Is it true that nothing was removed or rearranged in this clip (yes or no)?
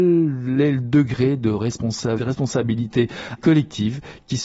no